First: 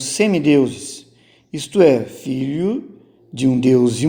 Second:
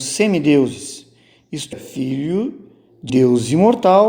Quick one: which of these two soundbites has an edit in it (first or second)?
second